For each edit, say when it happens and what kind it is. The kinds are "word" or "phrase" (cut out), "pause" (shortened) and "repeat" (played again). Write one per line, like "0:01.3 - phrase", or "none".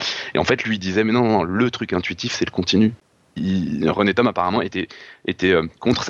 none